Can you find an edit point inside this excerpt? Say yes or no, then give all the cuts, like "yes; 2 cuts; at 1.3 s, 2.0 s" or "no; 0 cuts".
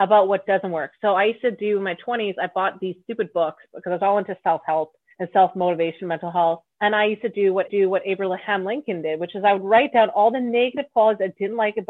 yes; 3 cuts; at 5.1 s, 6.7 s, 7.7 s